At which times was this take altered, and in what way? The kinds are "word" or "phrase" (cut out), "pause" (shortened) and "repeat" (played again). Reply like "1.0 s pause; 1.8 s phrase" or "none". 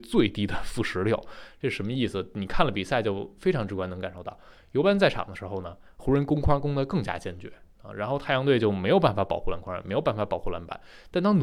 none